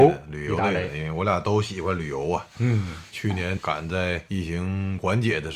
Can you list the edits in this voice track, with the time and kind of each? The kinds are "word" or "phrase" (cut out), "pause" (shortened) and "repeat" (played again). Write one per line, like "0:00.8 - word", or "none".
0:02.5 - pause